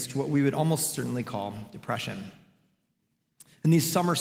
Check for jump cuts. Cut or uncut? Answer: uncut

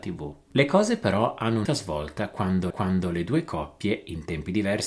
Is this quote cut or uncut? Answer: cut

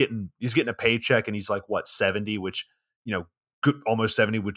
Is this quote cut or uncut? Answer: uncut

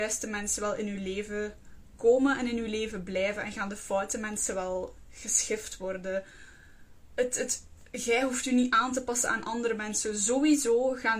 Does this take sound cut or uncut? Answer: uncut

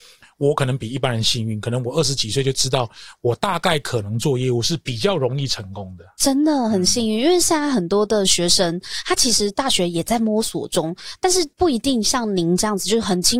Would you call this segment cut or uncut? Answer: cut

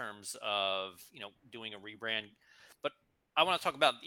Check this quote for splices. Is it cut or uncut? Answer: uncut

